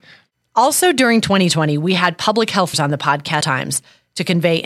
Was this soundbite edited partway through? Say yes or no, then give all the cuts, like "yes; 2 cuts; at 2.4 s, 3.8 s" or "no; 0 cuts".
yes; 2 cuts; at 2.7 s, 3.4 s